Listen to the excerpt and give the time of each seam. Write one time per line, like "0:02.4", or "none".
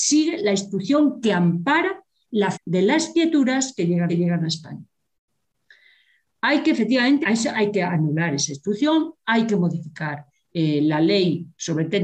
0:02.5
0:04.1
0:07.2